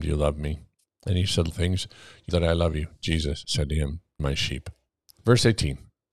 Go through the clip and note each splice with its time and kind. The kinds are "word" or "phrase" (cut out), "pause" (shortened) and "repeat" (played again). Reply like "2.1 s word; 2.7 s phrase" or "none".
1.5 s phrase; 2.3 s word; 4.2 s word